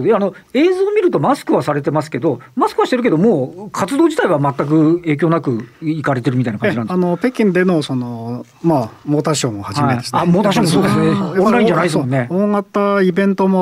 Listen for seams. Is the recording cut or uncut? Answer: cut